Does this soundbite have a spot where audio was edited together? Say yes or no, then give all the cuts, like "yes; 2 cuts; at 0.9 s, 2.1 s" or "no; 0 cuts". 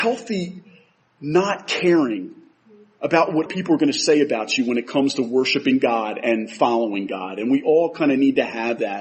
yes; 1 cut; at 3.5 s